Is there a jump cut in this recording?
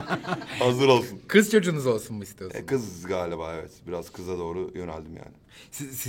no; 0 cuts

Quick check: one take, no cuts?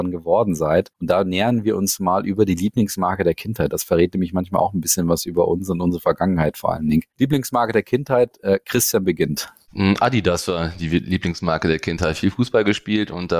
yes; 0 cuts

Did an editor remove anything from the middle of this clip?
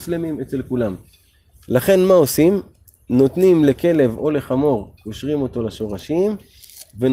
no; 0 cuts

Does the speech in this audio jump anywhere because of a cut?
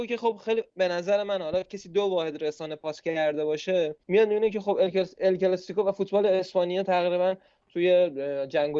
no; 0 cuts

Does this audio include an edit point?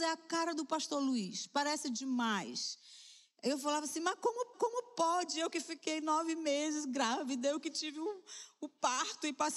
yes; 1 cut; at 4.5 s

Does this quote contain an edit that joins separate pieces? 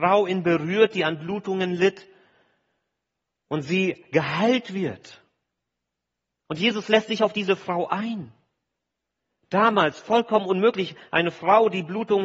no; 0 cuts

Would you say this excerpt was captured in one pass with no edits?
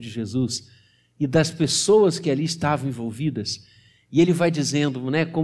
yes; 0 cuts

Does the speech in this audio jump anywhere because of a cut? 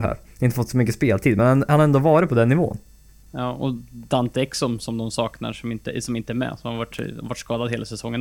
no; 0 cuts

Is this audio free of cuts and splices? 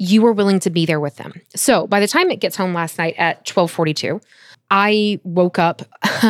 yes; 0 cuts

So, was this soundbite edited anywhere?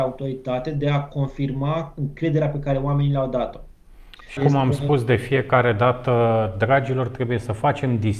yes; 1 cut; at 4.4 s

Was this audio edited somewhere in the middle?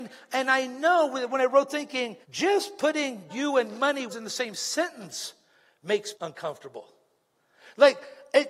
yes; 5 cuts; at 1.7 s, 2.2 s, 3.3 s, 4.1 s, 6.1 s

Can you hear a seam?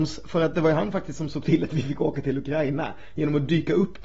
no; 0 cuts

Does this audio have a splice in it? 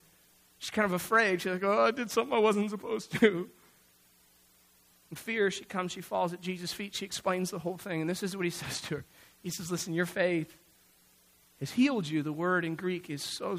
no; 0 cuts

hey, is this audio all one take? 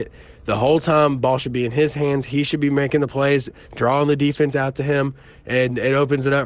yes; 0 cuts

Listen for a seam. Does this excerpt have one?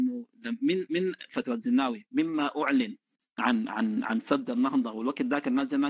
no; 0 cuts

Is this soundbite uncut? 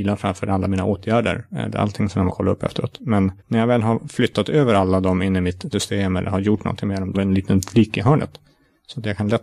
no; 4 cuts; at 2.3 s, 3.4 s, 5.7 s, 7.1 s

